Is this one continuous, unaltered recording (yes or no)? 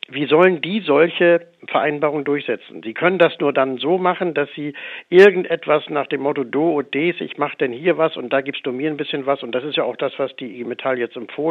no